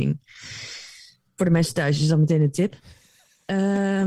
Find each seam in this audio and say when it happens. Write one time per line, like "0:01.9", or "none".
none